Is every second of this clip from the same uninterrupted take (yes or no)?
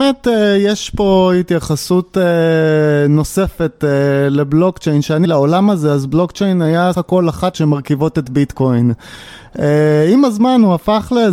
no